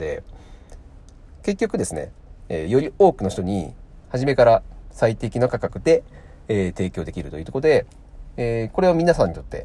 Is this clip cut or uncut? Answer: cut